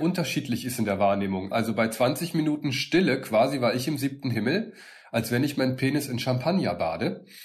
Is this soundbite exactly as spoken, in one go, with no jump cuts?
yes; 0 cuts

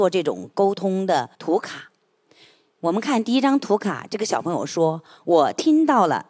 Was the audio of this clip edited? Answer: yes; 1 cut; at 1.3 s

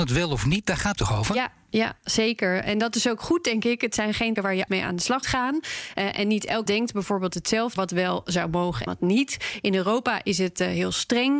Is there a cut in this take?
yes; 7 cuts; at 1.0 s, 4.4 s, 4.7 s, 5.2 s, 6.7 s, 7.8 s, 8.9 s

